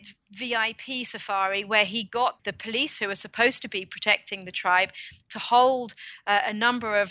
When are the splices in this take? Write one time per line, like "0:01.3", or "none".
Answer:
none